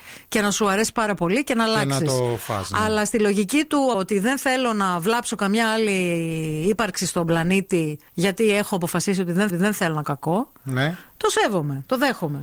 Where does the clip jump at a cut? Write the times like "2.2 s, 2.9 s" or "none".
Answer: 3.9 s, 8.1 s, 9.5 s, 10.0 s